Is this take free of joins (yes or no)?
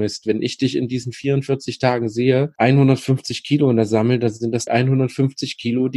no